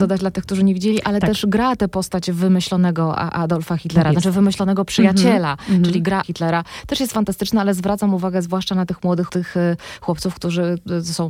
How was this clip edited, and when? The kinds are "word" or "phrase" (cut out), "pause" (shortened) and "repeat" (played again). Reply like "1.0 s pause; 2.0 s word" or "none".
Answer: 6.2 s word; 9.3 s word